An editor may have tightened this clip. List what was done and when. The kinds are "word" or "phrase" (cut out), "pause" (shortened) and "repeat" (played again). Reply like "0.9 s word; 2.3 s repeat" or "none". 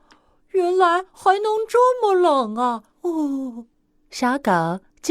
1.1 s pause; 2.9 s pause